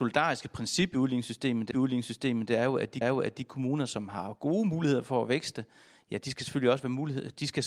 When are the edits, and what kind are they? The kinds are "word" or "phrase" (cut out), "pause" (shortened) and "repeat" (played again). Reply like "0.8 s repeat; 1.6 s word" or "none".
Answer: 1.7 s repeat; 3.0 s repeat